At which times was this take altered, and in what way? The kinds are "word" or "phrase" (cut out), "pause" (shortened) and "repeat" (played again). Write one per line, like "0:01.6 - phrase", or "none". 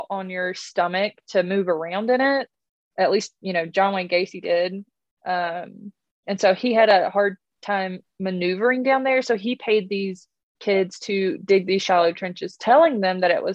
none